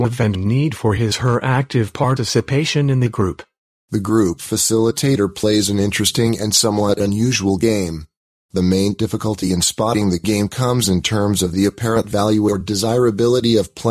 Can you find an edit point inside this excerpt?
no; 0 cuts

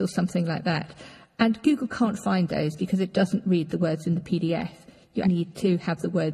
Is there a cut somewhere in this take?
yes; 1 cut; at 5.2 s

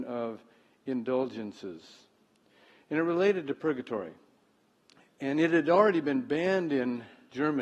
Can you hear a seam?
no; 0 cuts

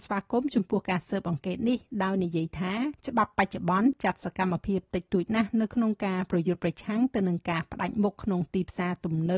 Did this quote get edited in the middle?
yes; 1 cut; at 3.0 s

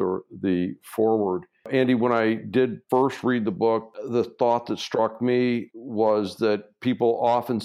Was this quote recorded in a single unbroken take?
yes; 0 cuts

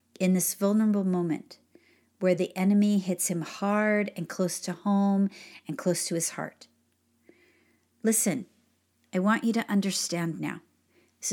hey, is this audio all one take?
yes; 0 cuts

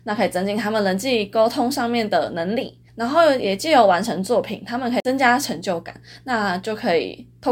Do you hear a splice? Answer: yes; 1 cut; at 2.9 s

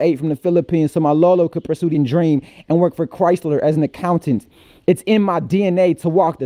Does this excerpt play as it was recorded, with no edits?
no; 1 cut; at 1.9 s

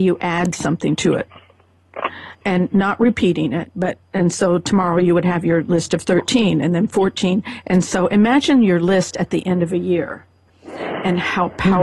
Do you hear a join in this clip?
yes; 2 cuts; at 2.4 s, 10.5 s

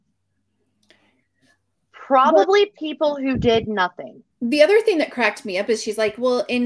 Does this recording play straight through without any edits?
no; 1 cut; at 4.3 s

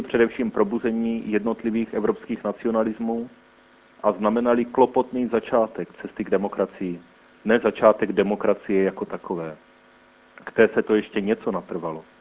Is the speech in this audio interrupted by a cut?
no; 0 cuts

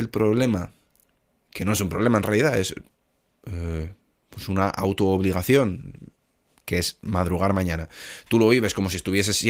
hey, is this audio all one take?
yes; 0 cuts

